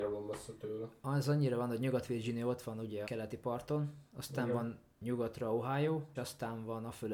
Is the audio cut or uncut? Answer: cut